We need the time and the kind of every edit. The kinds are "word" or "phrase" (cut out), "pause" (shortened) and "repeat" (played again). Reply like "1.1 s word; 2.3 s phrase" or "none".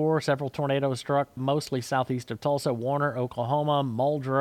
1.4 s word